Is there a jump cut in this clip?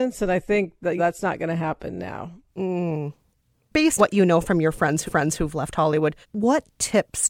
yes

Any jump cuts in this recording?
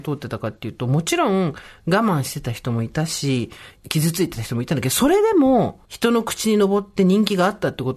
yes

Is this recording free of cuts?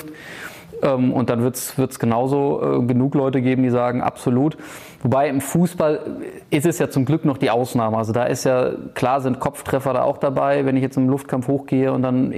yes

